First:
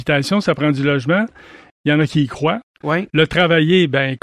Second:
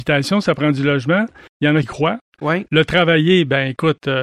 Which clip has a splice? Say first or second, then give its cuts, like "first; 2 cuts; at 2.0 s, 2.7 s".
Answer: second; 2 cuts; at 1.5 s, 1.8 s